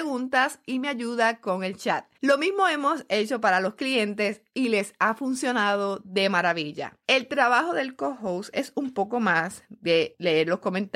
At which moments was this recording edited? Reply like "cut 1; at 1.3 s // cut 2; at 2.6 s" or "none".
cut 1; at 2.1 s // cut 2; at 7.0 s